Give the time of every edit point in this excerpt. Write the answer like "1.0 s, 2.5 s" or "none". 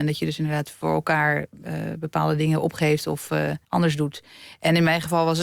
3.6 s